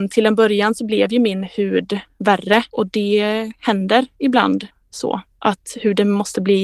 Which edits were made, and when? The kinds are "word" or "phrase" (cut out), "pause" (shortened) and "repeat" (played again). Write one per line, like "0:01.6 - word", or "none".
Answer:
0:02.7 - pause

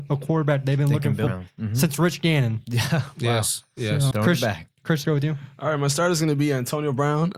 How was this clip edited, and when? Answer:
0:01.3 - word
0:04.1 - word
0:05.0 - word

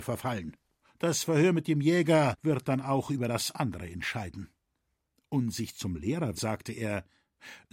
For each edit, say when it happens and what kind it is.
0:06.4 - word

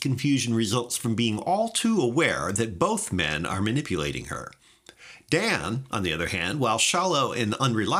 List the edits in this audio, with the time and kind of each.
none

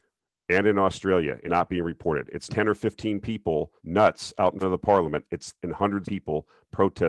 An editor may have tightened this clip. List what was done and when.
0:01.5 - word
0:02.5 - word
0:03.8 - pause
0:04.6 - word
0:05.6 - word
0:06.0 - phrase

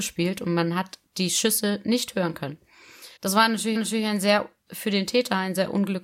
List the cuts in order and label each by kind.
0:01.1 - pause
0:03.2 - pause
0:03.8 - repeat
0:04.7 - phrase

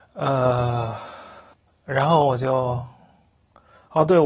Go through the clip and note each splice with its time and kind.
0:01.5 - pause

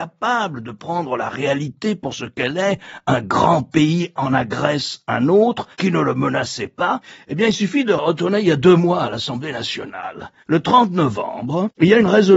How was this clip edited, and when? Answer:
0:05.7 - pause
0:10.4 - pause

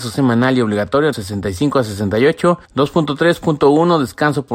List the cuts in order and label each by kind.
0:01.1 - word
0:02.6 - pause

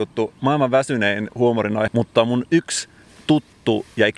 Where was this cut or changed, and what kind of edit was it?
0:01.9 - word

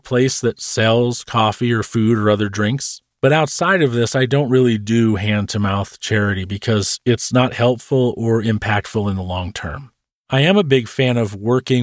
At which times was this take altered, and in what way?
none

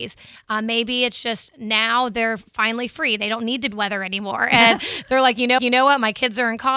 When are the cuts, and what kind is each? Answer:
0:03.7 - phrase
0:05.6 - repeat

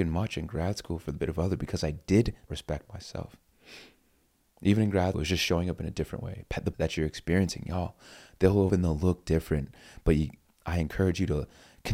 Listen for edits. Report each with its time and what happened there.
0:01.2 - word
0:02.5 - word
0:05.1 - word
0:06.7 - word
0:08.7 - word

